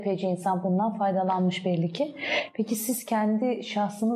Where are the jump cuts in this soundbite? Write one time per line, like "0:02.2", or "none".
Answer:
none